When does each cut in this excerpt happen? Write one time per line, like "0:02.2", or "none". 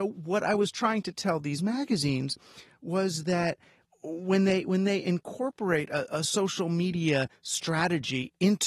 none